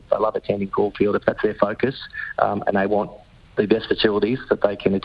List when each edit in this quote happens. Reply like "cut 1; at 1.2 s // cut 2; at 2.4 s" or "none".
none